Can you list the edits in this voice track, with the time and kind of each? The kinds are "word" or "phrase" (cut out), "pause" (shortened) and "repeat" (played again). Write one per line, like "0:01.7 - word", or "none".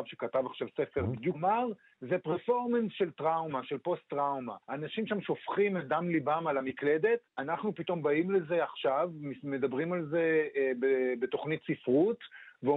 0:01.3 - phrase
0:04.6 - pause
0:07.3 - pause